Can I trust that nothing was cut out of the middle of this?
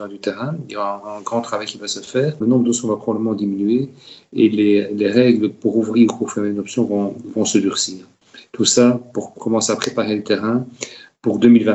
yes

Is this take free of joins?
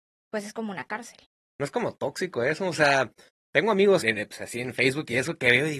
no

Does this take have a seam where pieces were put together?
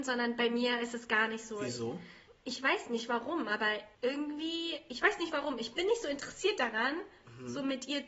yes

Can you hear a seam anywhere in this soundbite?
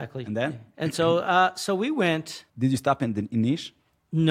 yes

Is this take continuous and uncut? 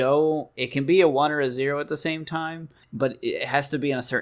no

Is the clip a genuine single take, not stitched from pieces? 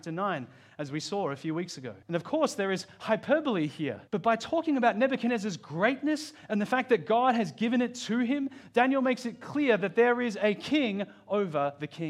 no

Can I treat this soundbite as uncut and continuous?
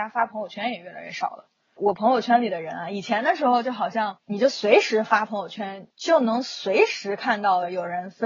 no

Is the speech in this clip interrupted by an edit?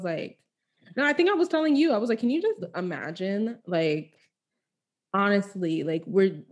no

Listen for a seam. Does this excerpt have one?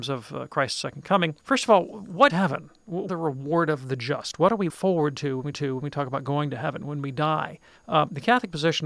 yes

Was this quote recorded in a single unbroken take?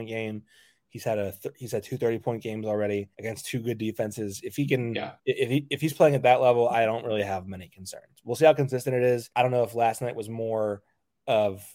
no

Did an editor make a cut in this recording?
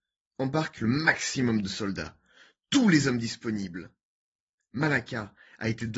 no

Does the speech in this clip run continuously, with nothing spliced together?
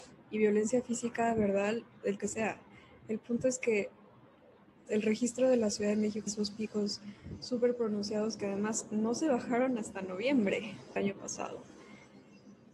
no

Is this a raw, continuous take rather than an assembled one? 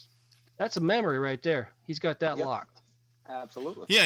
yes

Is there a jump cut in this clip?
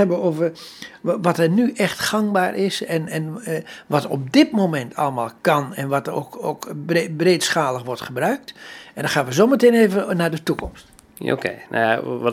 no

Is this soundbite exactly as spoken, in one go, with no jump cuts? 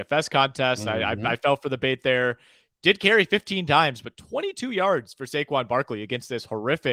yes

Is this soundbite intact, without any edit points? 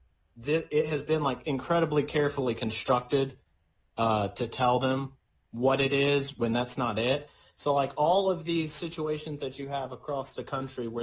yes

